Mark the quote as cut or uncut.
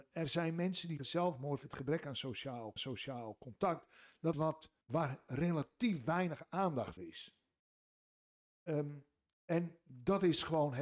cut